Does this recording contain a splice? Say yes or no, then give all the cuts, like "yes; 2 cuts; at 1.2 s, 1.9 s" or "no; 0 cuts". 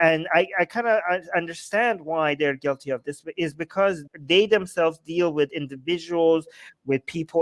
yes; 1 cut; at 4.1 s